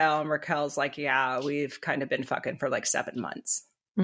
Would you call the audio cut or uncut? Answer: uncut